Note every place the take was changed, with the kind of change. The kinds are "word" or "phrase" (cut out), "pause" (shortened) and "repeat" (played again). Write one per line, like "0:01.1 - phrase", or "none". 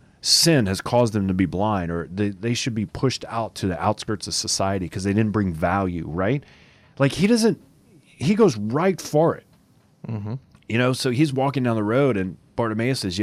none